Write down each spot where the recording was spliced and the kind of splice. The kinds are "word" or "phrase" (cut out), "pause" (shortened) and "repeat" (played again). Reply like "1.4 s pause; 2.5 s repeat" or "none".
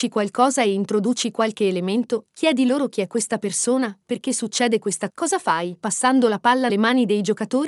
5.1 s word; 6.7 s word